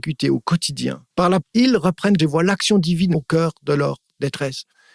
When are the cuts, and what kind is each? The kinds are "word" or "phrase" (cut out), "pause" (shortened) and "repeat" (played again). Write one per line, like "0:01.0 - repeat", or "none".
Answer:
0:01.1 - pause
0:01.4 - word
0:02.2 - word
0:03.1 - word